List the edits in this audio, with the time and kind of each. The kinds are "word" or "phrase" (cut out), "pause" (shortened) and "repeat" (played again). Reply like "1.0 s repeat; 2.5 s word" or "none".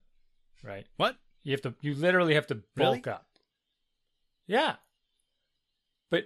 none